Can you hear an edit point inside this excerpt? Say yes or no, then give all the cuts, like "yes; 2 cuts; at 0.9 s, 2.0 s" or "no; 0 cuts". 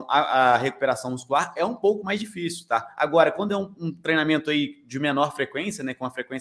no; 0 cuts